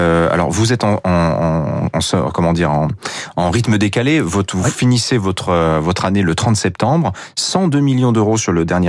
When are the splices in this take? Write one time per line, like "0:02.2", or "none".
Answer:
none